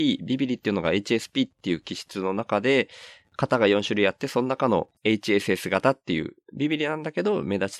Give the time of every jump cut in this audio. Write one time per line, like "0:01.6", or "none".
0:05.0